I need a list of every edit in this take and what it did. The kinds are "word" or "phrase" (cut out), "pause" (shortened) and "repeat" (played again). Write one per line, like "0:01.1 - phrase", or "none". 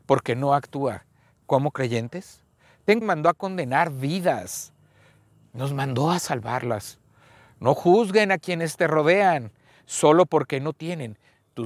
0:01.4 - word
0:03.0 - phrase